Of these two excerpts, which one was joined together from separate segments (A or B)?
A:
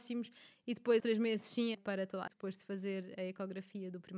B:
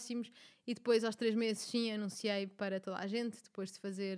A